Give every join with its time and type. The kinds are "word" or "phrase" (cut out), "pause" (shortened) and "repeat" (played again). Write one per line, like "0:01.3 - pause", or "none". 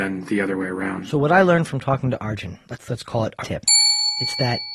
0:03.4 - word